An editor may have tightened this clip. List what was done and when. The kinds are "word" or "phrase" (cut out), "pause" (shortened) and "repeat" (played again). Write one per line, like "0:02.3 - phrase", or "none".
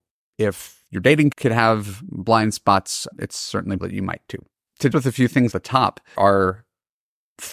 0:01.3 - word
0:03.1 - word
0:03.8 - word
0:04.9 - word
0:05.5 - word
0:06.1 - word

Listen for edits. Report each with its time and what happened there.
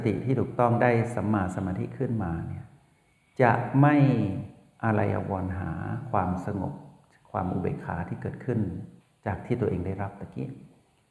none

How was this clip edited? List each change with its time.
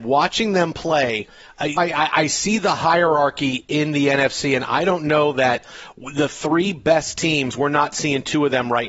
0:01.8 - word

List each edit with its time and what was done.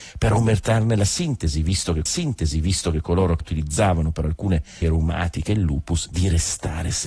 0:02.1 - repeat
0:03.4 - word
0:04.8 - word
0:06.1 - word

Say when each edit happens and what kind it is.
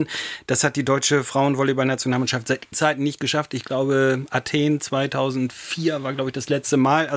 0:02.7 - word

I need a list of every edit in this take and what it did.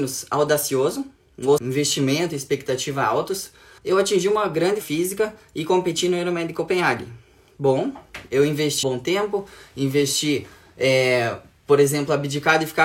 0:01.6 - word
0:03.8 - word
0:04.8 - word
0:08.8 - word

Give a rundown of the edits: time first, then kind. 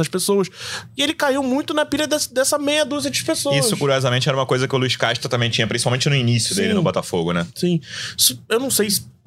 none

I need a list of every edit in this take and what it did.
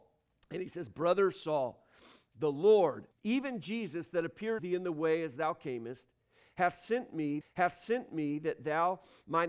0:03.1 - pause
0:04.6 - word
0:07.4 - repeat

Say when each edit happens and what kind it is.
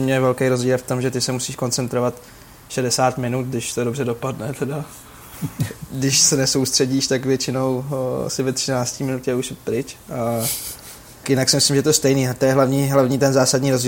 0:11.2 - word

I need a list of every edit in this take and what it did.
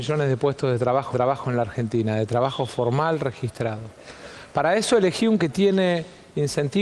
0:01.1 - repeat
0:05.4 - word

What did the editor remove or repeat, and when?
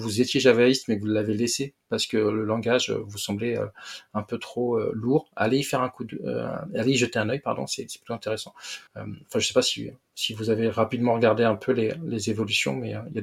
0:08.9 - pause

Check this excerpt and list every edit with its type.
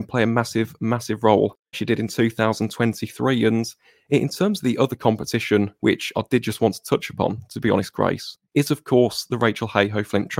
0:01.7 - word
0:05.8 - pause
0:08.4 - pause

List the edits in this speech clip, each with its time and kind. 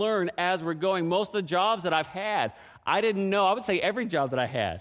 none

